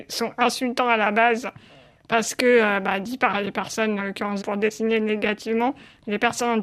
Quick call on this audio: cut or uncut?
cut